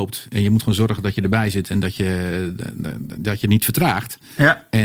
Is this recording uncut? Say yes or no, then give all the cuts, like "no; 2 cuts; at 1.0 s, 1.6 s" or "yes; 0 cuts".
yes; 0 cuts